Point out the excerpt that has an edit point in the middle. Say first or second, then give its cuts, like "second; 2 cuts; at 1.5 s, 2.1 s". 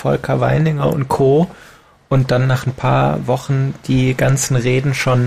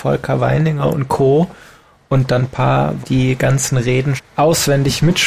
second; 3 cuts; at 2.4 s, 3.0 s, 4.2 s